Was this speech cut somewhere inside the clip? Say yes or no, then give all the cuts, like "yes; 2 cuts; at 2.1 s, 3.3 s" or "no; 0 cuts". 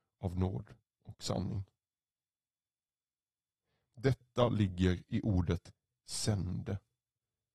no; 0 cuts